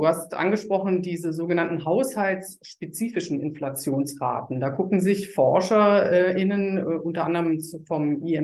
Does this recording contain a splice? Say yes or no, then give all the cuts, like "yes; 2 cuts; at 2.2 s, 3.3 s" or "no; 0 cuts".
no; 0 cuts